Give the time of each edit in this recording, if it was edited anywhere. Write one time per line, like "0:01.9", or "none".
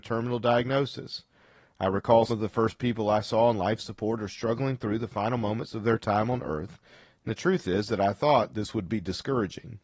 0:02.3